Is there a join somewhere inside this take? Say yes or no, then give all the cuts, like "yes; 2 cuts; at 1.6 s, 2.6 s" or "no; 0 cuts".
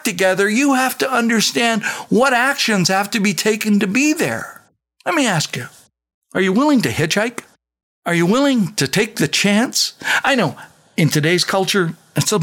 no; 0 cuts